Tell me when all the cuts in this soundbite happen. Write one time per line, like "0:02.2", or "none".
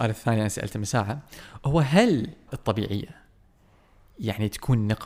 0:02.5